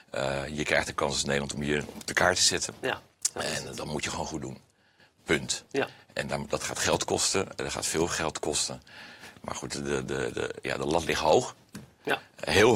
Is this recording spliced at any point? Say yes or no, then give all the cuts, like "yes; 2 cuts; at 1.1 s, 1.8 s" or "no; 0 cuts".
no; 0 cuts